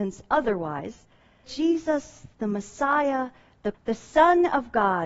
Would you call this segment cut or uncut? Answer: cut